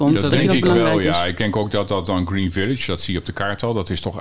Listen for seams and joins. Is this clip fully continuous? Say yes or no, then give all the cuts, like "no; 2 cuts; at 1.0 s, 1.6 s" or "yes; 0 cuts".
yes; 0 cuts